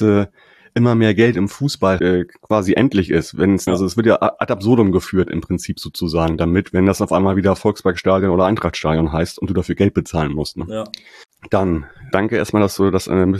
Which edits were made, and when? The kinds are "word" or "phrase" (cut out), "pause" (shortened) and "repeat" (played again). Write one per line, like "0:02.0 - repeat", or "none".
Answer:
0:02.0 - word
0:03.7 - word
0:12.1 - word